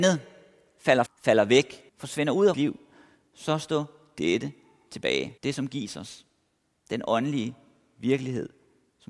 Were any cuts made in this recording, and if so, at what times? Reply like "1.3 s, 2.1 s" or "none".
1.1 s, 1.9 s, 2.5 s, 5.4 s